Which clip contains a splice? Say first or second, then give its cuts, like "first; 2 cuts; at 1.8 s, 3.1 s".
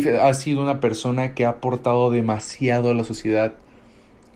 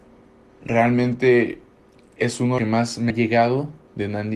second; 2 cuts; at 2.6 s, 3.1 s